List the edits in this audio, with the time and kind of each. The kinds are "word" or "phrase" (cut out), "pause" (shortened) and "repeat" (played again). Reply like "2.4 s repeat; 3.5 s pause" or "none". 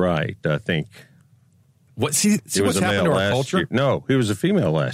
none